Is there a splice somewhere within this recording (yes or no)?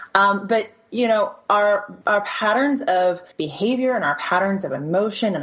yes